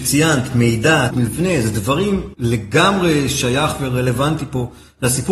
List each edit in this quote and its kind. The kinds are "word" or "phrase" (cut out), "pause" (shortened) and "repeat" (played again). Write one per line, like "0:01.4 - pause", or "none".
0:01.1 - word
0:02.3 - phrase